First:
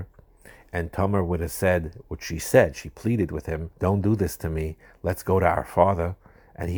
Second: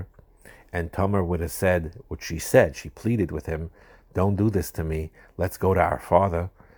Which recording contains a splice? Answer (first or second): first